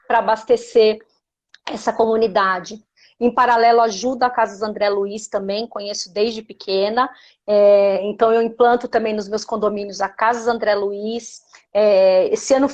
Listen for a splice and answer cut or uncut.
uncut